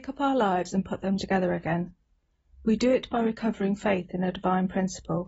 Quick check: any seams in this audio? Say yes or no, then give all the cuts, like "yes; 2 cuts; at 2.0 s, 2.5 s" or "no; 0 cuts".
no; 0 cuts